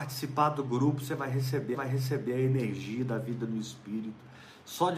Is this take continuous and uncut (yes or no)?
no